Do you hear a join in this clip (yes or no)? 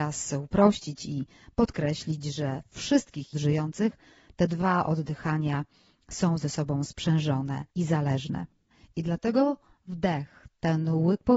yes